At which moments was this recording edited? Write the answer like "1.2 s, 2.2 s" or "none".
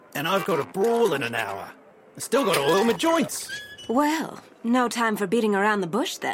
none